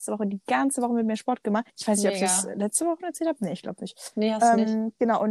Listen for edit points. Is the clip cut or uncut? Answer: cut